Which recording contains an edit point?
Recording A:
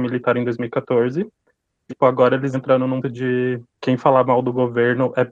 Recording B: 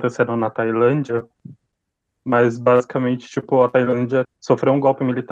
A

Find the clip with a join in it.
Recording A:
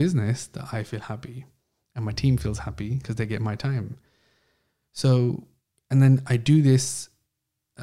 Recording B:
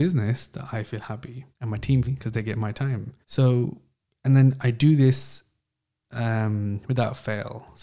B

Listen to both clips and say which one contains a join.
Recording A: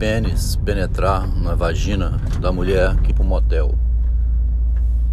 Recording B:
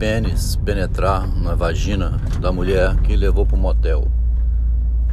A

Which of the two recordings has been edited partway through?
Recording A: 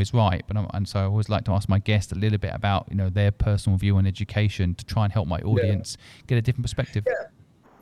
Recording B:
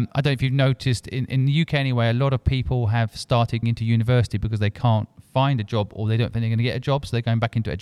B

